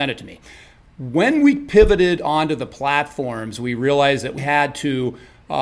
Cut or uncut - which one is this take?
cut